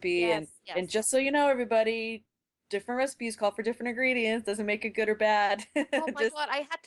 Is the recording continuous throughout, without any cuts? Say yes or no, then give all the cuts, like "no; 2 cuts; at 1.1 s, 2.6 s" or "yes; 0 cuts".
yes; 0 cuts